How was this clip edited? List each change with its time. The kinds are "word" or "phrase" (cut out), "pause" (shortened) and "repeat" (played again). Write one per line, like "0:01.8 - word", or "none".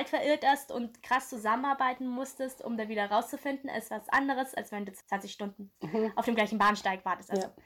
0:05.7 - pause